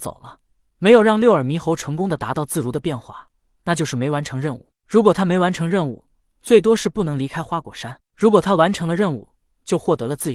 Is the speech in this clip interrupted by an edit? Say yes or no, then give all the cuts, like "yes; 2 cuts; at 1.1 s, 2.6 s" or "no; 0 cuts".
no; 0 cuts